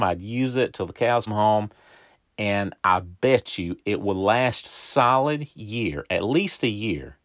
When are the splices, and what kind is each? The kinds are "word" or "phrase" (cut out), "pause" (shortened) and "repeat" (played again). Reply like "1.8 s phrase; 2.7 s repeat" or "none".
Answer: 1.3 s word; 4.6 s phrase